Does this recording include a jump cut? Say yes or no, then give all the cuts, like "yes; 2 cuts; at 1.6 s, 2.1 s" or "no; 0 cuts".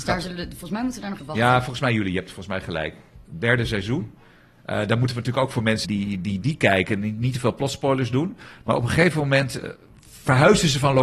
yes; 2 cuts; at 1.2 s, 5.8 s